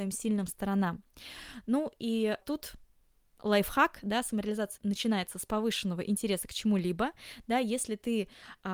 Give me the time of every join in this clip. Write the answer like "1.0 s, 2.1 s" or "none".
2.4 s, 4.8 s